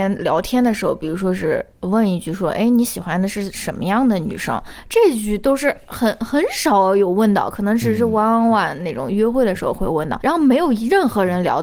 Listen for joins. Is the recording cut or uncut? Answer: cut